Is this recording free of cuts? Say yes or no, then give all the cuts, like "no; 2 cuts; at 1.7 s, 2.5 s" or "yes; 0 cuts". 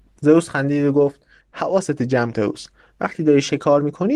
no; 2 cuts; at 1.4 s, 2.3 s